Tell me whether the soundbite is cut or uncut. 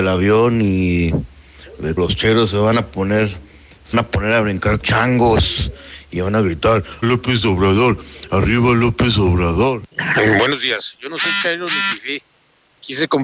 cut